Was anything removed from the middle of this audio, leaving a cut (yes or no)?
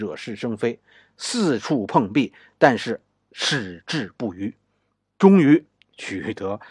no